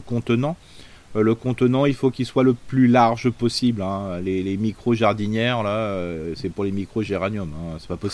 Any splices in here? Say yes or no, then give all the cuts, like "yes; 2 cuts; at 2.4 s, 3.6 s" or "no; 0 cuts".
no; 0 cuts